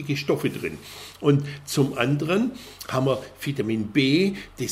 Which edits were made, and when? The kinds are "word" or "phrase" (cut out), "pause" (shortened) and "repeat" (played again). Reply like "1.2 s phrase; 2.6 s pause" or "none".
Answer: none